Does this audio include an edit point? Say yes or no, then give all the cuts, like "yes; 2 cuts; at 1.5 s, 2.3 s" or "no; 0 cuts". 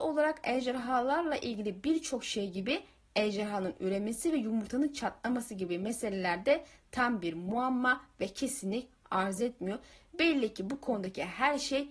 no; 0 cuts